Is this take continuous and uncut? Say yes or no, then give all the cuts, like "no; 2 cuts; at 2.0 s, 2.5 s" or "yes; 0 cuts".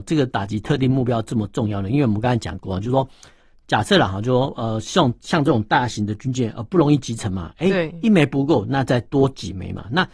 yes; 0 cuts